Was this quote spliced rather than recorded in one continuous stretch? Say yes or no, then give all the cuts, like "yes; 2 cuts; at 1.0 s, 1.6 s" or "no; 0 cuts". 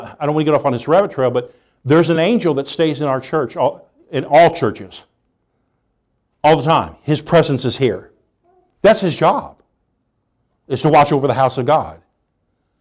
no; 0 cuts